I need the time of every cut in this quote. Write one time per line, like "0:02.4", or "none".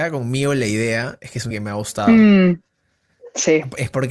0:01.5